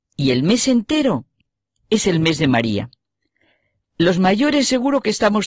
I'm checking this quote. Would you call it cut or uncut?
uncut